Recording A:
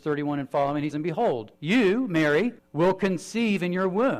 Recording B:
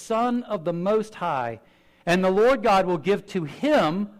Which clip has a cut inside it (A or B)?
A